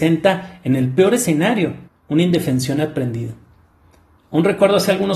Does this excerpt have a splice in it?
yes; 1 cut; at 1.9 s

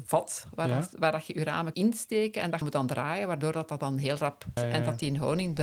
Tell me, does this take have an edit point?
yes; 3 cuts; at 1.7 s, 2.6 s, 4.6 s

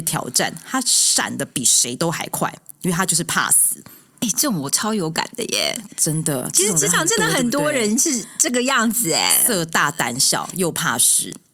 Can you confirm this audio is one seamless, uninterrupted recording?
yes; 0 cuts

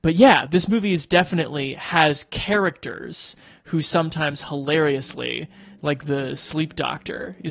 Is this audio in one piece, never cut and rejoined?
yes; 0 cuts

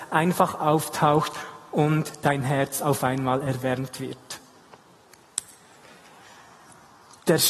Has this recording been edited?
no; 0 cuts

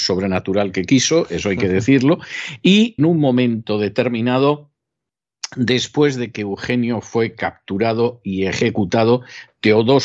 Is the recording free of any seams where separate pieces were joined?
no; 1 cut; at 3.0 s

